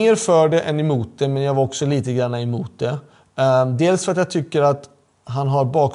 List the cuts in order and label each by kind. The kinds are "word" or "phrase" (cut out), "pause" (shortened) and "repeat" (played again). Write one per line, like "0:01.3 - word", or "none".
none

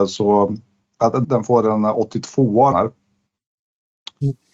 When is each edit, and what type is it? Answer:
0:01.2 - word
0:02.7 - word

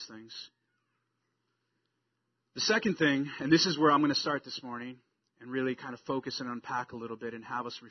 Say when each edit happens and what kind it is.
none

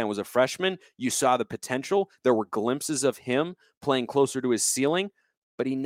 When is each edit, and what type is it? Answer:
none

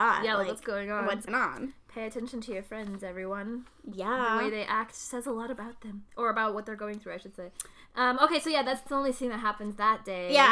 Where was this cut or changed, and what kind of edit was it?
0:01.3 - word
0:07.7 - pause
0:08.9 - word

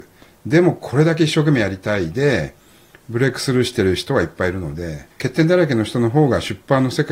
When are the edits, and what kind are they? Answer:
0:05.1 - pause

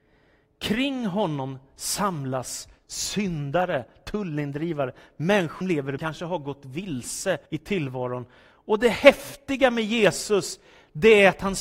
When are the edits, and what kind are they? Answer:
0:05.6 - word
0:06.0 - phrase
0:07.5 - pause

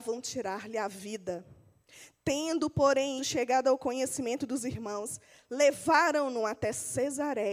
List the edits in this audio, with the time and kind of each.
0:03.2 - word

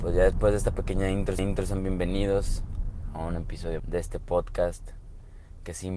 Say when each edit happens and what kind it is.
0:01.4 - repeat
0:03.8 - word

